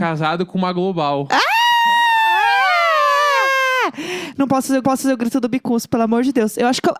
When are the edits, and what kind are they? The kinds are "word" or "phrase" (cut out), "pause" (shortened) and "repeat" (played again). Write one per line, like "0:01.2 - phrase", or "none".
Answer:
0:04.8 - repeat